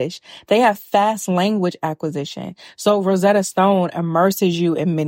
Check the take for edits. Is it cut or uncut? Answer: uncut